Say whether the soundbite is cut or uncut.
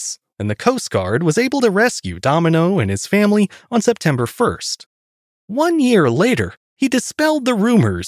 uncut